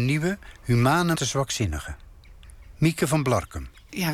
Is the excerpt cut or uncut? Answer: cut